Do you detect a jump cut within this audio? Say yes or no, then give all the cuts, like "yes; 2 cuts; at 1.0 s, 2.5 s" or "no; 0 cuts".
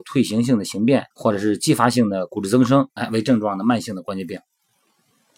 yes; 1 cut; at 1.1 s